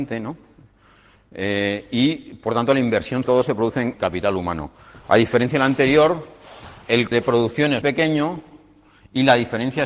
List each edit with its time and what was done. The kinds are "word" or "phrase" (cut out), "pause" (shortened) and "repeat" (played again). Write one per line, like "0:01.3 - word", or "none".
0:03.2 - word
0:03.9 - word
0:07.1 - word
0:07.8 - word